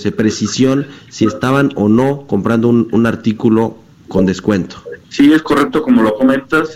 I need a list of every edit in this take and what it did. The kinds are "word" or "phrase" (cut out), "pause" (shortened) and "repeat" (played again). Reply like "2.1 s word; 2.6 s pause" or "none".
none